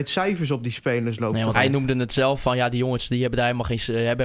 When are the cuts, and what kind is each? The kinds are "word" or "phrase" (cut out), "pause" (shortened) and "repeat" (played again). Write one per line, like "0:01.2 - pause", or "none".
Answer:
0:01.5 - word